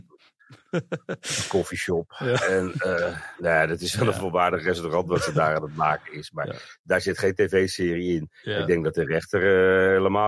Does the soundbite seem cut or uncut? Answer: uncut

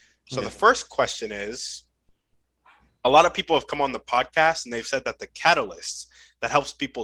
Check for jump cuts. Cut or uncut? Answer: uncut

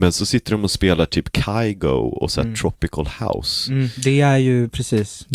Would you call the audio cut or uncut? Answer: uncut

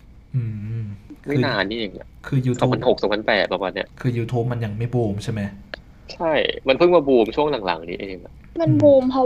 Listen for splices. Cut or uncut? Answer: cut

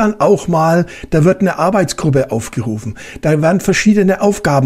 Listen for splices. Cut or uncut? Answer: uncut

